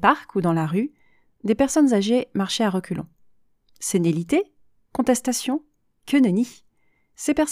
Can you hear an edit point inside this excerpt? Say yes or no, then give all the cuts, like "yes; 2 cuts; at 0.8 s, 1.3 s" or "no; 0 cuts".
no; 0 cuts